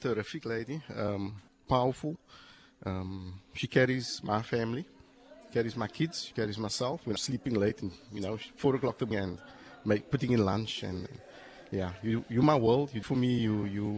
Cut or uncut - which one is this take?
cut